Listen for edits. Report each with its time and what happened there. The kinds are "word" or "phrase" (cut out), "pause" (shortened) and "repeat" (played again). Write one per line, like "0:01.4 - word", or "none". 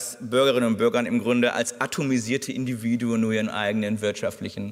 none